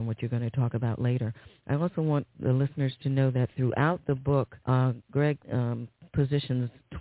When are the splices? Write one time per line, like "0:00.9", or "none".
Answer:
0:04.6
0:05.4